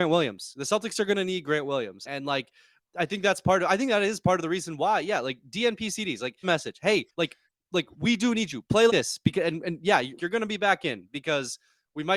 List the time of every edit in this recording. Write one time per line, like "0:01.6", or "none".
0:02.1
0:06.4
0:07.1
0:07.9
0:08.9
0:10.2